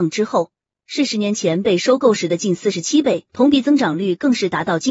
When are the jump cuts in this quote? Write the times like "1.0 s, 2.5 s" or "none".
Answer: 3.3 s

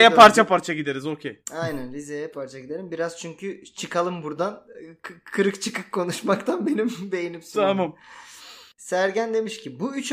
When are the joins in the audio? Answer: 2.3 s, 8.7 s

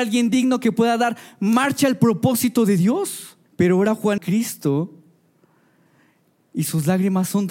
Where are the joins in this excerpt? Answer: 3.5 s, 4.2 s

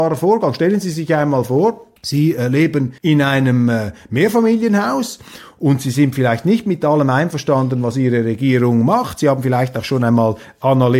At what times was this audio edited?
2.0 s, 3.0 s

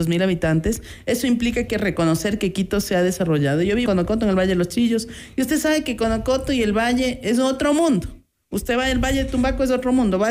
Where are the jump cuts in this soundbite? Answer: 1.7 s, 3.9 s

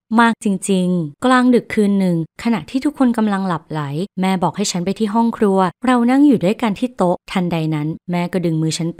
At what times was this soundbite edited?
1.2 s

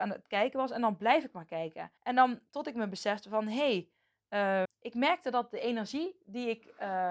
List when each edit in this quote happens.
2.0 s, 4.6 s

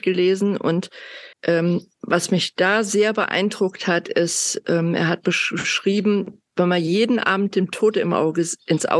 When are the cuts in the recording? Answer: 1.3 s

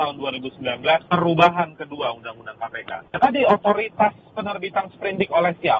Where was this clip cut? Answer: none

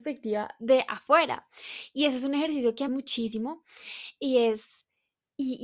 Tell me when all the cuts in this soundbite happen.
2.9 s

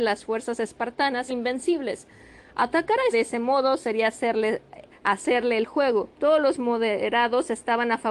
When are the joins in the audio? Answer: 1.3 s, 3.1 s, 4.9 s, 6.1 s

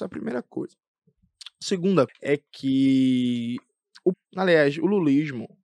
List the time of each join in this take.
2.1 s, 4.1 s

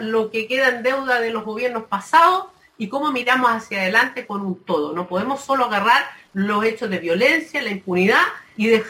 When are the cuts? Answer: none

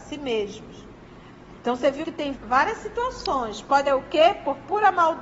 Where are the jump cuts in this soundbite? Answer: 1.6 s, 2.0 s, 2.3 s, 3.9 s

